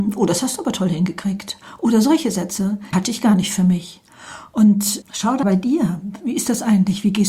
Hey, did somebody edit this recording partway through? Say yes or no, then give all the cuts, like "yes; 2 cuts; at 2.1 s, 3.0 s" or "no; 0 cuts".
yes; 3 cuts; at 2.9 s, 5.0 s, 5.4 s